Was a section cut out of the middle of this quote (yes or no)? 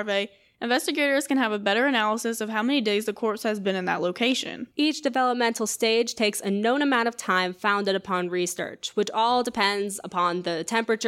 yes